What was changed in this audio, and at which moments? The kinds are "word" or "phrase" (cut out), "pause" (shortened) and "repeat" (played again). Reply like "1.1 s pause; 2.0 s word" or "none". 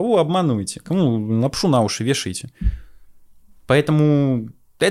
none